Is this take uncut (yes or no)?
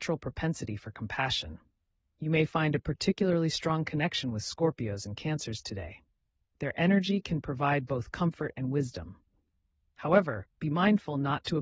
yes